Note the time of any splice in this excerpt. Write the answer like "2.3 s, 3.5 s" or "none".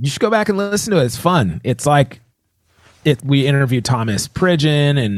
3.2 s